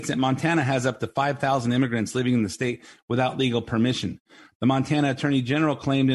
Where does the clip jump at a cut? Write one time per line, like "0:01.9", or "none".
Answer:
none